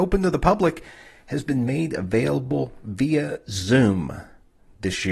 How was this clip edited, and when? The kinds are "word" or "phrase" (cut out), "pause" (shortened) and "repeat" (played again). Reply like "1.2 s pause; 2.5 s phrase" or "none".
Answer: none